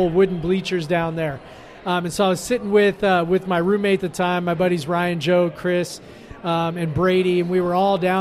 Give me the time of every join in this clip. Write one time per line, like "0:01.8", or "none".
0:04.0